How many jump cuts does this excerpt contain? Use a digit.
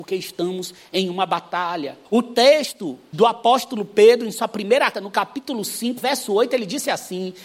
4